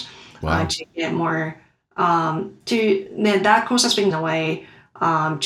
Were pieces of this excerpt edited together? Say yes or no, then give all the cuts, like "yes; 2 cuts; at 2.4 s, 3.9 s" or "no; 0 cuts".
yes; 1 cut; at 4.1 s